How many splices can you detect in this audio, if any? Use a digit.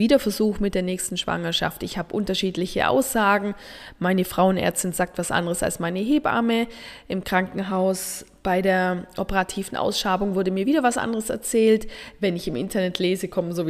0